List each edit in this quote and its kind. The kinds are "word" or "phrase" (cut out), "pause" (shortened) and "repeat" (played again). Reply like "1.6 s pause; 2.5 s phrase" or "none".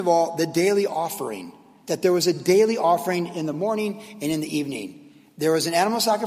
none